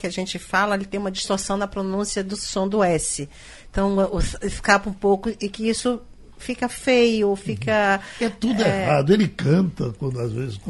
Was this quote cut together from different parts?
no; 0 cuts

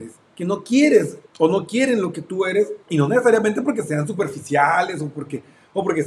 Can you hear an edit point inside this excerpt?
yes; 2 cuts; at 1.3 s, 2.8 s

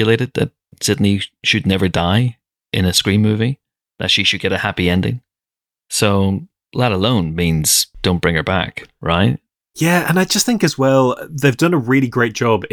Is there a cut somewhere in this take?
no; 0 cuts

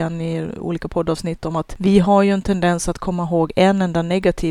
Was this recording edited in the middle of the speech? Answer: no; 0 cuts

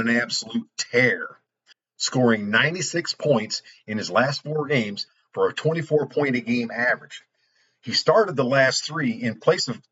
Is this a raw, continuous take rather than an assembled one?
yes; 0 cuts

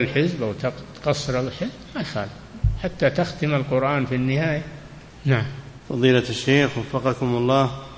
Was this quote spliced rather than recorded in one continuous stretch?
yes; 1 cut; at 5.1 s

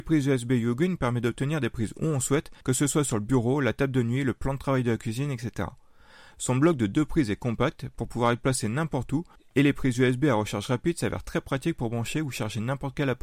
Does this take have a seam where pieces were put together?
yes; 2 cuts; at 2.6 s, 9.4 s

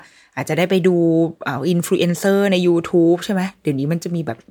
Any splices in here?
no; 0 cuts

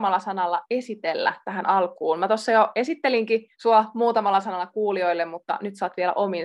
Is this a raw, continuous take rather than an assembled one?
no; 1 cut; at 3.5 s

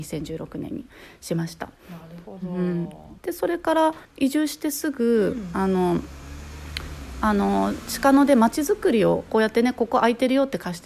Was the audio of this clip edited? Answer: yes; 2 cuts; at 3.2 s, 4.0 s

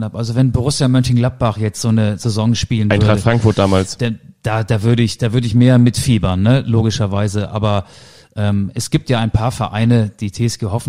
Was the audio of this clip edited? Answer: no; 0 cuts

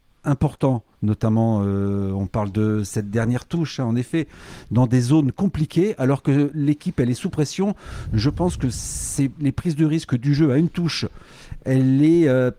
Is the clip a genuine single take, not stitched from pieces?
no; 1 cut; at 0.9 s

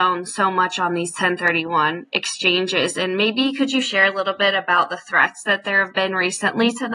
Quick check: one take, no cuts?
yes; 0 cuts

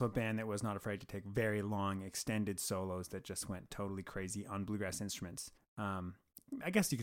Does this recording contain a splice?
yes; 1 cut; at 5.6 s

